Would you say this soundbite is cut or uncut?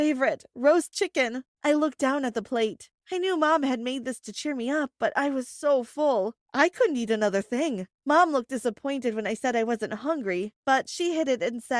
uncut